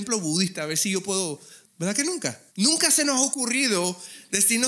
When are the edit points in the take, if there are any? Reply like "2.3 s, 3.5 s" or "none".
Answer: 2.5 s